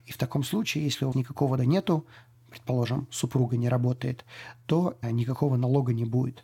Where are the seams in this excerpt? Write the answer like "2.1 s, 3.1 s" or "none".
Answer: 1.1 s, 1.6 s, 5.0 s